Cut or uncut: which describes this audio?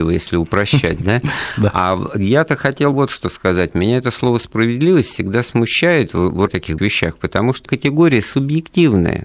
cut